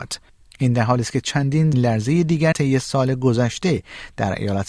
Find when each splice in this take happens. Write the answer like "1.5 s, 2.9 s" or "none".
1.7 s, 2.5 s

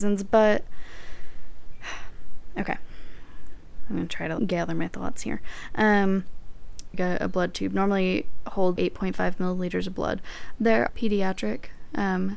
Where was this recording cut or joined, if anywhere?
4.4 s, 6.9 s, 8.8 s, 10.9 s

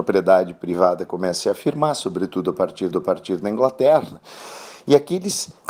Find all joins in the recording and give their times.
2.9 s

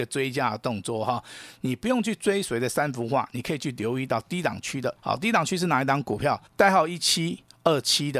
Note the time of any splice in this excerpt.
5.0 s, 6.5 s

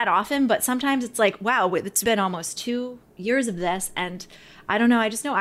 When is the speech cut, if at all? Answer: 2.0 s

